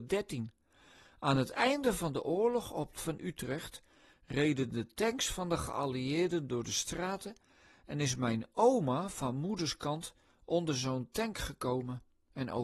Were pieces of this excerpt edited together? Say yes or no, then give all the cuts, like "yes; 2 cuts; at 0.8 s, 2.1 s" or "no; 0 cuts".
yes; 1 cut; at 3.0 s